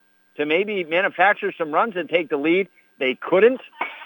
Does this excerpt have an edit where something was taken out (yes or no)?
no